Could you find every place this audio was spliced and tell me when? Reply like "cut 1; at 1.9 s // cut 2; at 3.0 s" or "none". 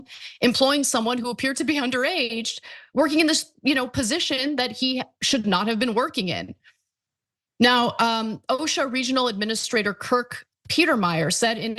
none